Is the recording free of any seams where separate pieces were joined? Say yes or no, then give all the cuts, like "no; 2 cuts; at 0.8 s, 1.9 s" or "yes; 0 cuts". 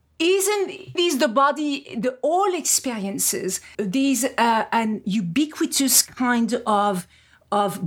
no; 3 cuts; at 1.0 s, 3.7 s, 5.0 s